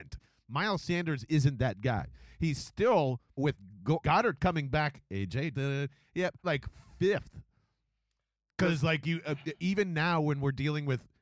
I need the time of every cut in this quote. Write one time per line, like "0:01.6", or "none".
0:03.4
0:04.0
0:05.5
0:06.4